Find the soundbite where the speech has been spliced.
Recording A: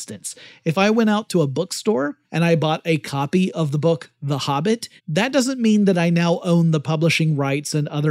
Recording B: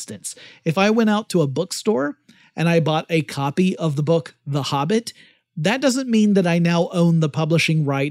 A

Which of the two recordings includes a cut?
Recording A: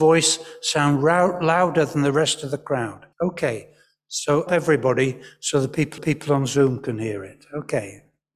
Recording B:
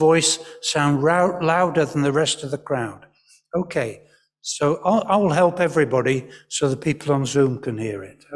A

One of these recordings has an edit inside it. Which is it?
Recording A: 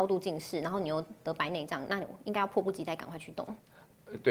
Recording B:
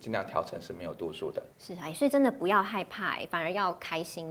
B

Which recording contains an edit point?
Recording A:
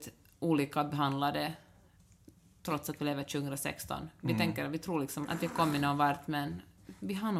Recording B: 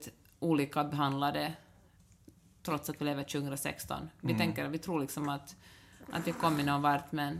A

